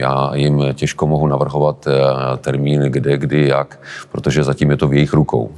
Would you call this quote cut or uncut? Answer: uncut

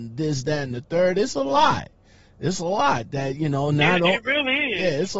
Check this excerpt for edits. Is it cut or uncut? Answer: uncut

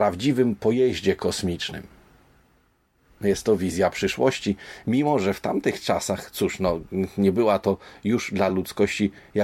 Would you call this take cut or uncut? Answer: uncut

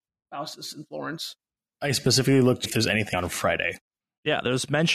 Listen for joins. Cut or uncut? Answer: cut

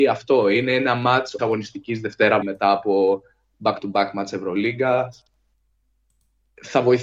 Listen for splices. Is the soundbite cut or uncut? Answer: cut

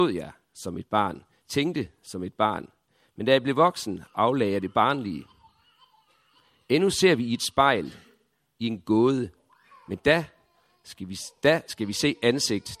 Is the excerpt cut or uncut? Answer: uncut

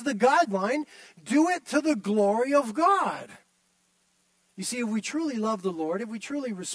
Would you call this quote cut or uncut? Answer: uncut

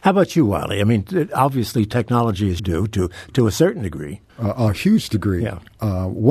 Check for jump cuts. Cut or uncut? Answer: cut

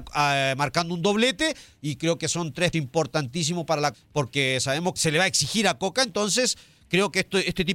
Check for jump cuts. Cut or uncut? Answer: cut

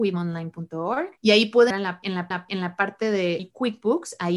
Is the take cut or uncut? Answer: cut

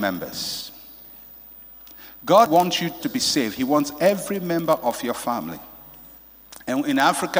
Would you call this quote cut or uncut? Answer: cut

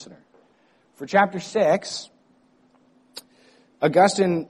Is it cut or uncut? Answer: uncut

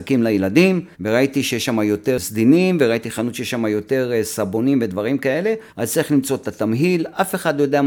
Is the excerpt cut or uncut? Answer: cut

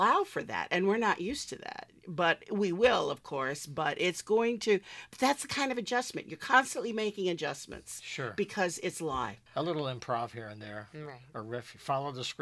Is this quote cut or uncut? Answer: cut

